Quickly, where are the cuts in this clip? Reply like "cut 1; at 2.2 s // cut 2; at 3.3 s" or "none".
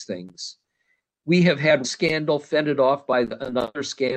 cut 1; at 1.8 s